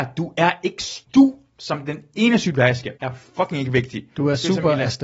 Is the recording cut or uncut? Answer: cut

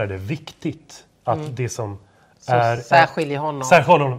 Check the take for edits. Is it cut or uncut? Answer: uncut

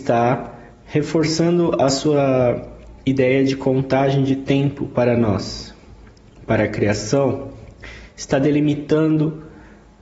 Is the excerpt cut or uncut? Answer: uncut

